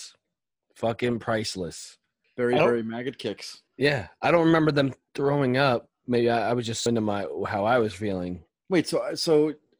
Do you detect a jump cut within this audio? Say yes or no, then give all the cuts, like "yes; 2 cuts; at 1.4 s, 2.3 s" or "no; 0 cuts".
yes; 3 cuts; at 3.7 s, 5.1 s, 6.9 s